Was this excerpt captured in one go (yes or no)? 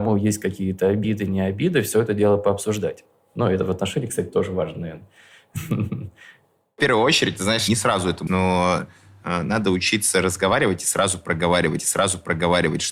no